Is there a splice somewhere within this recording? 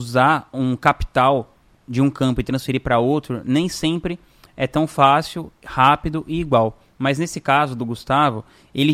no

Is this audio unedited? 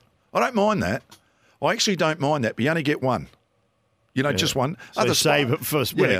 yes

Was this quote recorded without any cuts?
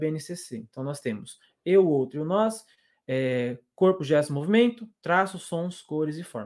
yes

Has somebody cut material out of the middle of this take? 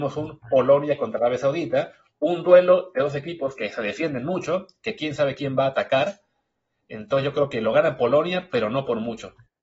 no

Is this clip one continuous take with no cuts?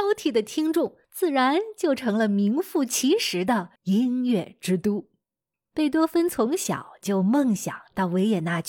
no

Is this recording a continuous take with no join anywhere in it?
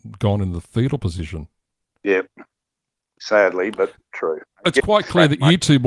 yes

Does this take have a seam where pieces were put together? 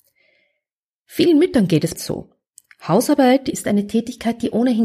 yes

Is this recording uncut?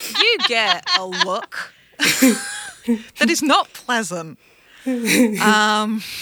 yes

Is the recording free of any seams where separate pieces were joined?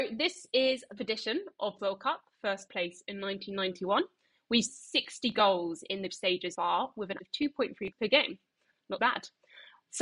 no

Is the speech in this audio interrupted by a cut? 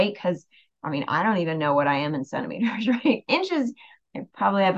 no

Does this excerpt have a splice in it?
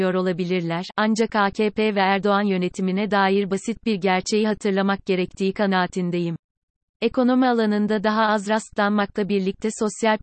no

